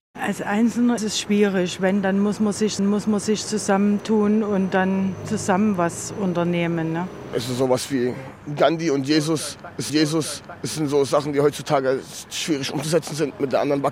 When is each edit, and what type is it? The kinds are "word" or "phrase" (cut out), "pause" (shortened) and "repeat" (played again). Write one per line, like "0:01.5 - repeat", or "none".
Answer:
0:01.0 - word
0:02.8 - repeat
0:09.9 - repeat